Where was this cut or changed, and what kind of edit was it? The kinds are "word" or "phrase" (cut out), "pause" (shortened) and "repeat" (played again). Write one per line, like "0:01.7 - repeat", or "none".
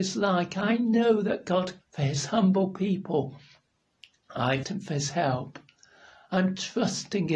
0:01.8 - word
0:04.6 - word